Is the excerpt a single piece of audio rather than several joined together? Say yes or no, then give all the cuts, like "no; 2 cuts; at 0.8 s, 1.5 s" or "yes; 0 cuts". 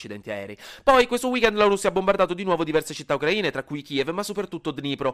yes; 0 cuts